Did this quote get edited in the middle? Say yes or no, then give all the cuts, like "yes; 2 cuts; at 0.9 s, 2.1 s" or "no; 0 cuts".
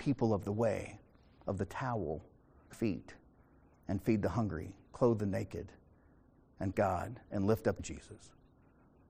yes; 3 cuts; at 2.7 s, 6.7 s, 7.8 s